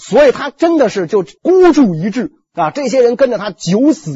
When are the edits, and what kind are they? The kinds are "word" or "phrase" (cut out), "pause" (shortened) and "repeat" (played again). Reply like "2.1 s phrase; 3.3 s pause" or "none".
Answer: 1.4 s pause